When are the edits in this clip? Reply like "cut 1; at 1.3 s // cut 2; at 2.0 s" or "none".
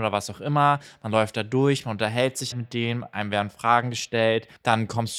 cut 1; at 2.5 s